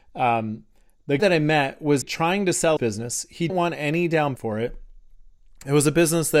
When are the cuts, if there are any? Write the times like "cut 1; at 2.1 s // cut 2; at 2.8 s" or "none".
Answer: cut 1; at 1.2 s // cut 2; at 2.0 s // cut 3; at 2.8 s // cut 4; at 3.5 s // cut 5; at 4.4 s